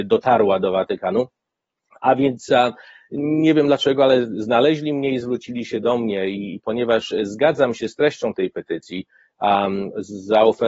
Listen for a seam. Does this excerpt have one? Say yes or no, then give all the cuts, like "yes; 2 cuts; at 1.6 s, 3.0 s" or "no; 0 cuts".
no; 0 cuts